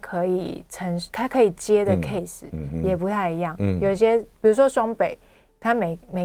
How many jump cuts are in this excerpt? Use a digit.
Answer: 1